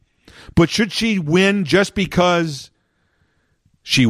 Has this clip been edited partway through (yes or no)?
no